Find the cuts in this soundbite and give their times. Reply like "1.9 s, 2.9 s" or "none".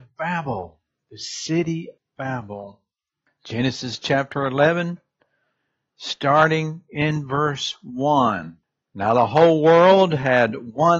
2.0 s, 8.6 s